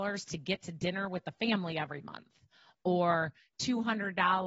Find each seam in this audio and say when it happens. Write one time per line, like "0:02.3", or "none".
none